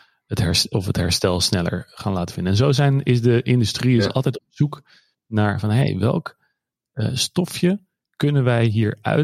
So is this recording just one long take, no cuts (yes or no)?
yes